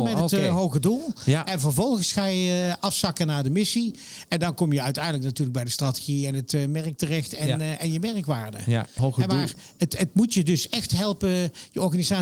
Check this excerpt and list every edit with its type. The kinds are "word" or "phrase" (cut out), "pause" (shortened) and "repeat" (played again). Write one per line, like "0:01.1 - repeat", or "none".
0:09.0 - word

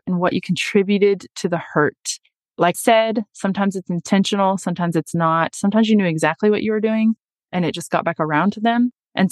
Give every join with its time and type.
0:02.7 - word

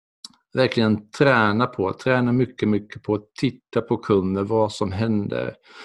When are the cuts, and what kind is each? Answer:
0:02.6 - word

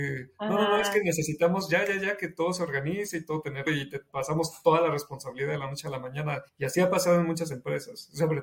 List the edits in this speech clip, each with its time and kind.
0:03.7 - word
0:06.5 - pause

